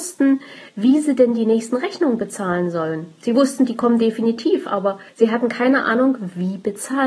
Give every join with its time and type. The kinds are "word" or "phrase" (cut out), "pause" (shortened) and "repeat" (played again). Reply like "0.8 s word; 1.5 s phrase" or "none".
5.1 s pause

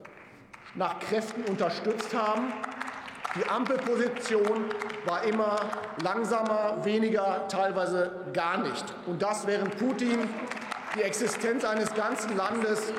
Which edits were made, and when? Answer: none

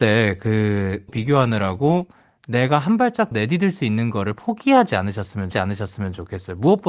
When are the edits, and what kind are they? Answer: 1.1 s word; 3.3 s word; 5.5 s repeat

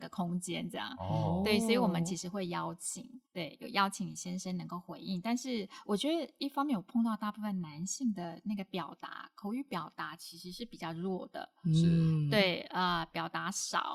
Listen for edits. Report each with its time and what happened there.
3.3 s pause

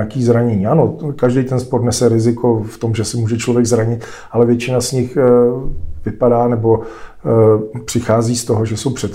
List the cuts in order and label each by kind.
none

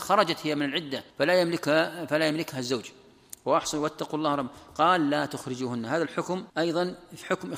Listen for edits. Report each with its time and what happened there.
1.1 s pause; 6.5 s pause

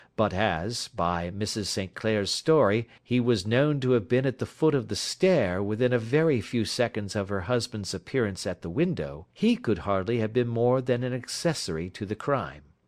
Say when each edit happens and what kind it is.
3.0 s pause; 9.3 s pause

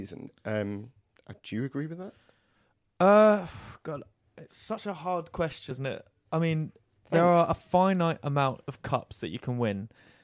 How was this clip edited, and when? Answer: 5.7 s word

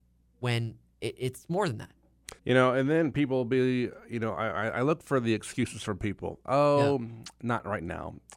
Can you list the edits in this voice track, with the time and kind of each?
2.4 s pause

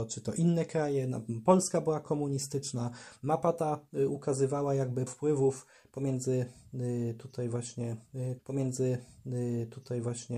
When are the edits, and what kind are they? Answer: 5.1 s word; 8.4 s repeat

